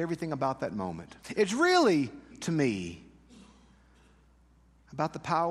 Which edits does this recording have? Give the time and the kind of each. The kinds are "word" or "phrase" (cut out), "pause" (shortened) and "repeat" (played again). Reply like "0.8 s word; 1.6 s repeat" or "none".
1.2 s pause; 2.3 s phrase